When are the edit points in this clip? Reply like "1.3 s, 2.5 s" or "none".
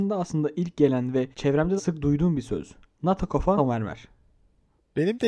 1.3 s, 1.8 s, 2.9 s, 3.6 s